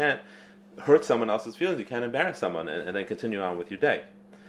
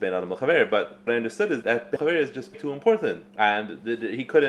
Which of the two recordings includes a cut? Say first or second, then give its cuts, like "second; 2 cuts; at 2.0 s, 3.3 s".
second; 5 cuts; at 1.1 s, 1.6 s, 2.0 s, 2.5 s, 3.3 s